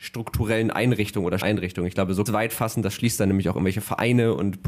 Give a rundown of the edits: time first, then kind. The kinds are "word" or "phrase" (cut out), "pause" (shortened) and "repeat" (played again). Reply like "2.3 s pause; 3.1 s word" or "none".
1.4 s word; 2.3 s phrase